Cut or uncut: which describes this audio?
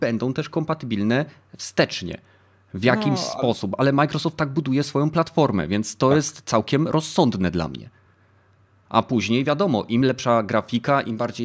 uncut